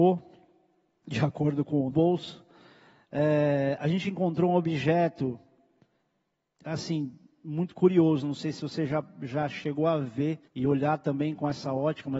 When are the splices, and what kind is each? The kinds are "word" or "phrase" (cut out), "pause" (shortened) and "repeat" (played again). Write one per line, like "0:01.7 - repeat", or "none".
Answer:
0:01.9 - word
0:10.5 - pause